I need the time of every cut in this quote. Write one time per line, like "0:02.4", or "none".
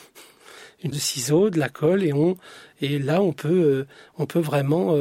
0:00.9